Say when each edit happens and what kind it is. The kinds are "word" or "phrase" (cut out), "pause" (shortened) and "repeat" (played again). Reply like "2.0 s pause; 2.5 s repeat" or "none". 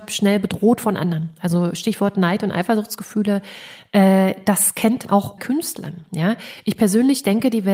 5.1 s word; 5.4 s word